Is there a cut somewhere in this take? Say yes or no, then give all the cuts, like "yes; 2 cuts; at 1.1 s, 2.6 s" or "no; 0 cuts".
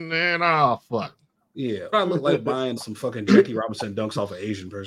yes; 2 cuts; at 1.9 s, 2.8 s